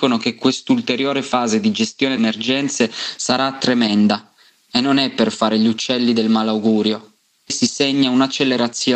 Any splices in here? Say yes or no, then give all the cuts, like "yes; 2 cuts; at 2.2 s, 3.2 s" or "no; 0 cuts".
yes; 1 cut; at 2.2 s